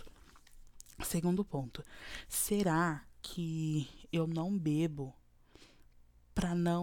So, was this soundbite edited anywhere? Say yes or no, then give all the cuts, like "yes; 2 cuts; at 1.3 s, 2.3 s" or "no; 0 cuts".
no; 0 cuts